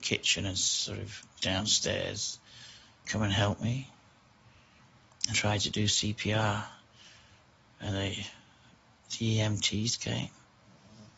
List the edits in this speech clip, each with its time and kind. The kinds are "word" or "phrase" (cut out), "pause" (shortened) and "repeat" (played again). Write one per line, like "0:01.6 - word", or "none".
0:01.4 - word
0:03.0 - word
0:05.3 - word
0:07.9 - word

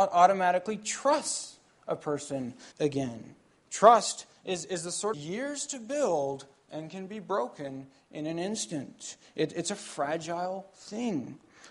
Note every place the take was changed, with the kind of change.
0:02.7 - pause
0:05.1 - phrase

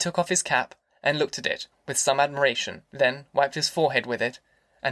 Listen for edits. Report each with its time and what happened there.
0:02.9 - pause

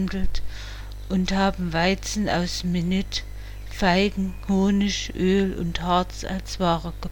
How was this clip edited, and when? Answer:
none

